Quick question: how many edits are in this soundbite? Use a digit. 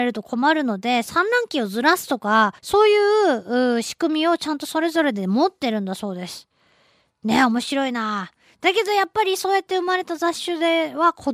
1